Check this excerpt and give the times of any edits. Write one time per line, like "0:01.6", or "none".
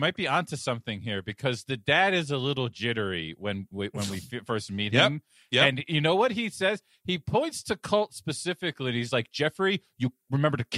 none